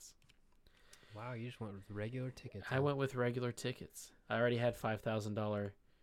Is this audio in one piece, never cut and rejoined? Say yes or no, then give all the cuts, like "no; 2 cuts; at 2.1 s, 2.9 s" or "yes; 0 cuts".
no; 1 cut; at 4.2 s